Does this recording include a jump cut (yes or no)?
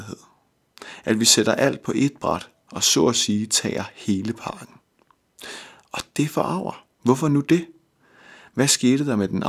yes